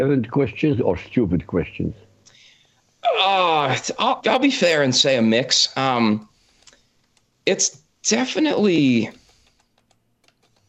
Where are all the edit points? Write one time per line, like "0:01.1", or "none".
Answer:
0:04.2